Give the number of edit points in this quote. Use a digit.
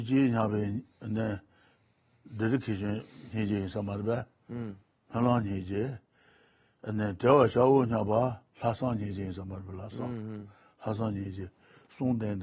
1